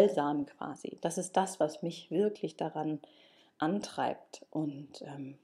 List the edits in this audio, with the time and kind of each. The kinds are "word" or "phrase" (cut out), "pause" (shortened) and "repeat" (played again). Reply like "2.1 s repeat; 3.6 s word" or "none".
none